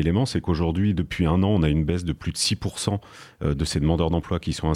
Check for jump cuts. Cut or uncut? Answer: uncut